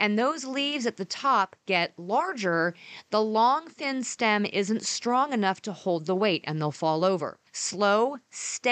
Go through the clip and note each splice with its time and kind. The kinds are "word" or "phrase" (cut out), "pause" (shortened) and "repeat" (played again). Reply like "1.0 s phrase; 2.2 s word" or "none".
7.5 s pause